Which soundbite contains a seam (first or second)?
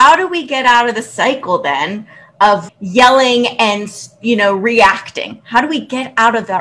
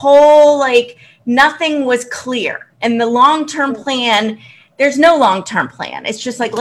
first